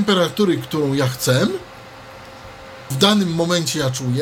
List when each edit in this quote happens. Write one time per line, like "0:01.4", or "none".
0:02.9

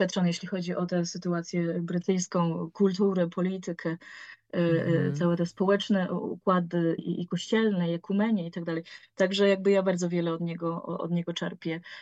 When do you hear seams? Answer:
0:07.0

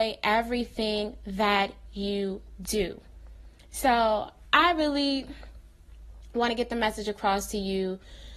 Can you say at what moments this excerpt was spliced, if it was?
none

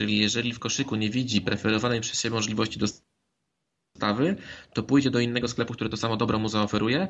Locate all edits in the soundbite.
none

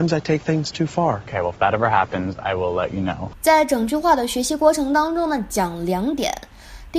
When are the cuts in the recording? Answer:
none

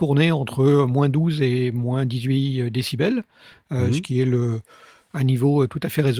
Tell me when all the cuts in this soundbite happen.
none

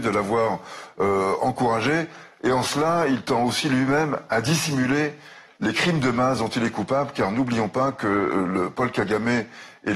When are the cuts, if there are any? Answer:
none

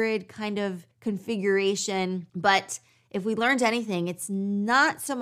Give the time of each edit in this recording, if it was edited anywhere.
0:00.9

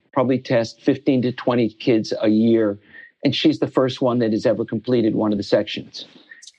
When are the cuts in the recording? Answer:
none

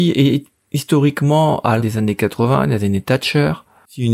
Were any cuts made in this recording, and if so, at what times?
0:01.8

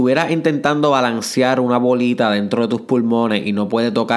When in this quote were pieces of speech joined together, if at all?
none

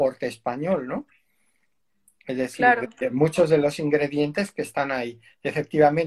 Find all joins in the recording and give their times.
none

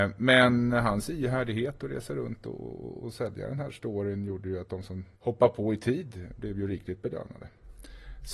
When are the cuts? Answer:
0:05.1

